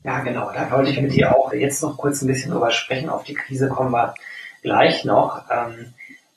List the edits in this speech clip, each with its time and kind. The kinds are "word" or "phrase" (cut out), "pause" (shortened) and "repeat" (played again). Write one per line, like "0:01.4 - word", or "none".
0:01.5 - word